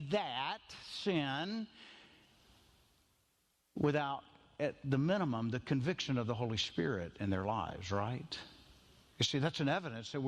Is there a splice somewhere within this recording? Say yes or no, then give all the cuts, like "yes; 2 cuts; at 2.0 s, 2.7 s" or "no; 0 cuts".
no; 0 cuts